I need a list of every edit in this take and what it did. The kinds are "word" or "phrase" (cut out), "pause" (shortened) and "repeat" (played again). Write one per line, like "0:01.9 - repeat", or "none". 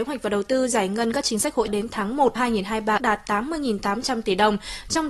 0:01.7 - word
0:02.4 - word
0:03.0 - word

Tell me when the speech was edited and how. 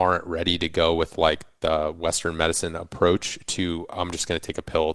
none

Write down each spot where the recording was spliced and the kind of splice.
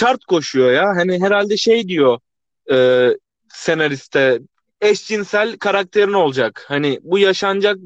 0:03.4 - pause

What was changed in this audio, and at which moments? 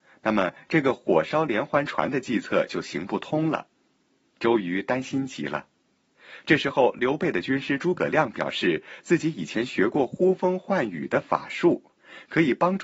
none

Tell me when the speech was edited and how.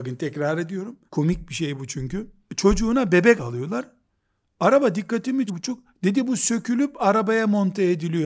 0:01.1 - pause
0:02.5 - pause
0:03.4 - word
0:05.5 - word

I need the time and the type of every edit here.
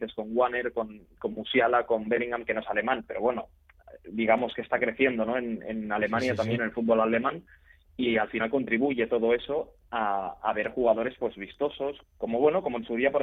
0:12.0 - word

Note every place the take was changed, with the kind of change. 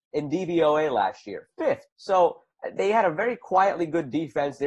0:01.9 - pause

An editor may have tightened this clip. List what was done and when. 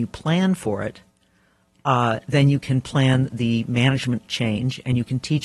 none

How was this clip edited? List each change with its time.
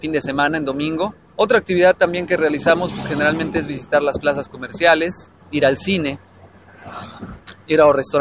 0:01.2 - pause
0:05.4 - pause

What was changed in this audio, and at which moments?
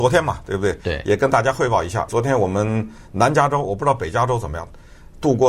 0:02.1 - word

